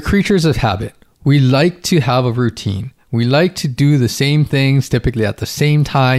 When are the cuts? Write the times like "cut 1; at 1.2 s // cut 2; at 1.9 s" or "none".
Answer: none